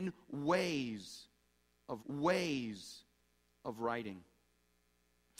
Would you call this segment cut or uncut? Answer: cut